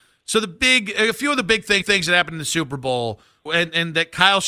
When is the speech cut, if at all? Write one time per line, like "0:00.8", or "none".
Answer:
0:01.8
0:03.5